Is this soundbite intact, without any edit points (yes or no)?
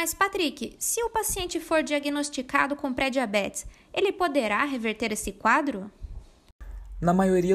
yes